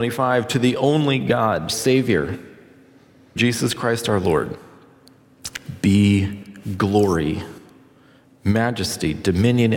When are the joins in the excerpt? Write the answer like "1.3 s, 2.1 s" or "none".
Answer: 1.7 s, 3.4 s